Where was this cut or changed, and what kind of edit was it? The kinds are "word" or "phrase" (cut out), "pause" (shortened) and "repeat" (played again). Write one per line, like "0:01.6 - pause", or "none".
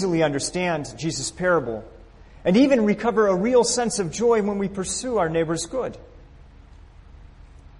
none